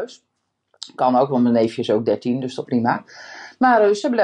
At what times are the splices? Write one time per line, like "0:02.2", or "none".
0:02.6